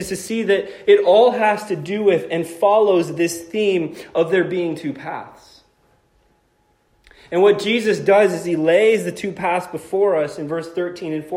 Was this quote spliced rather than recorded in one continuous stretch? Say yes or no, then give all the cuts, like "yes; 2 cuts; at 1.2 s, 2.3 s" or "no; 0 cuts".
no; 0 cuts